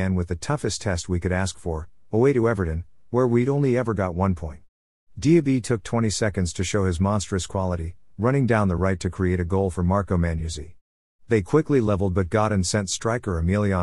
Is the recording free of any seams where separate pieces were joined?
yes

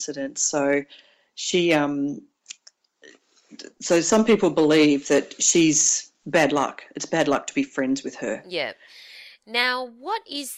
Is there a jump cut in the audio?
no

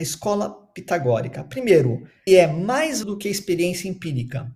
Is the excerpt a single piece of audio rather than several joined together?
no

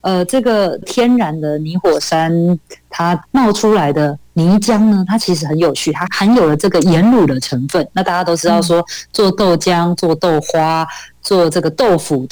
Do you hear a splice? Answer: no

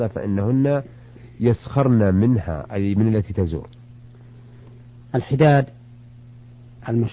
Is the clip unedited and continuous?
yes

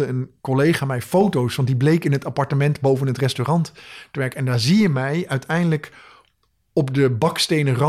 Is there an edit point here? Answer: no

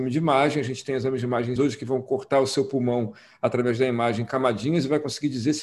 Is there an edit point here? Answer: yes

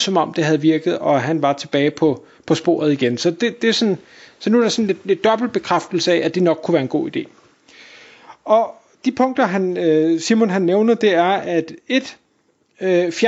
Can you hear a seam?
no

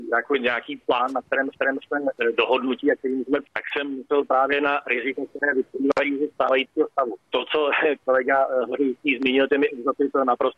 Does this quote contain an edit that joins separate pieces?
yes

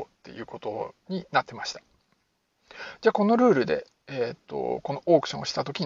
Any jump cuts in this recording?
no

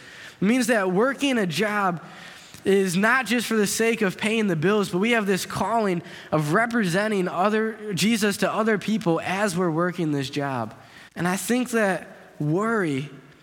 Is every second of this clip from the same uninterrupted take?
no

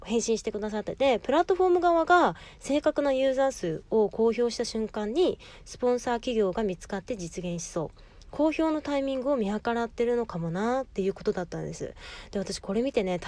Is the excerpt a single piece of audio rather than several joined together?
yes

